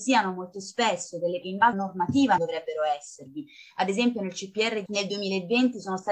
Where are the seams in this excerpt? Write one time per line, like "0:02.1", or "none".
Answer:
0:01.4
0:01.7
0:02.4
0:04.9